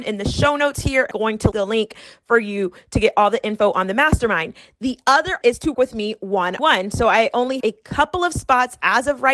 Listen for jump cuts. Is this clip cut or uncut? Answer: cut